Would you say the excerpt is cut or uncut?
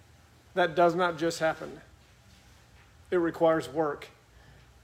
uncut